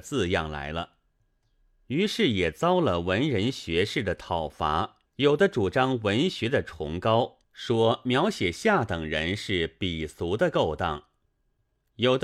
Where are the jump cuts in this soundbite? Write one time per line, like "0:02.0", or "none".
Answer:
0:05.1
0:07.4